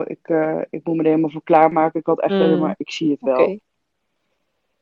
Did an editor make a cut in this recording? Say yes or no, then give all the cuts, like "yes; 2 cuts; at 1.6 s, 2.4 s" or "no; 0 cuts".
no; 0 cuts